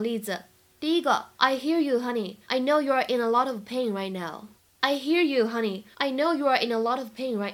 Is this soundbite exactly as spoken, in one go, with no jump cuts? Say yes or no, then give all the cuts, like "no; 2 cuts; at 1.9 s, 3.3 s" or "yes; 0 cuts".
no; 4 cuts; at 1.3 s, 2.4 s, 4.6 s, 5.9 s